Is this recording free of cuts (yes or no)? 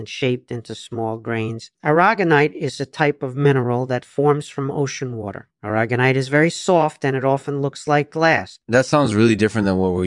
no